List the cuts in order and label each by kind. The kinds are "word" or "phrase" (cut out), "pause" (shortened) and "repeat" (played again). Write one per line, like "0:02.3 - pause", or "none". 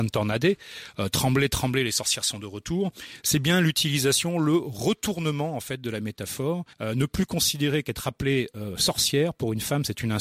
0:06.7 - pause